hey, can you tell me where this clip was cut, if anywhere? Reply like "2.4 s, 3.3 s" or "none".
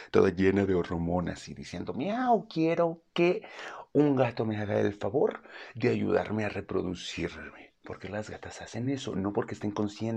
none